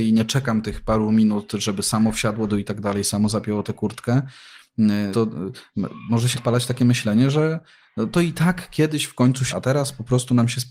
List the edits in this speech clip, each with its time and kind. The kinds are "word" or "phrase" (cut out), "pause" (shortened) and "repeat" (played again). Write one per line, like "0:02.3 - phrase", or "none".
0:02.5 - word
0:05.1 - word
0:06.3 - word
0:09.5 - word